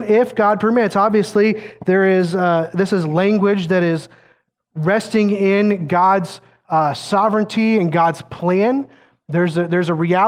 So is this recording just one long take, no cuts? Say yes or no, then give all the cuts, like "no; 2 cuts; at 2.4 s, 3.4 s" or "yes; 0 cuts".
yes; 0 cuts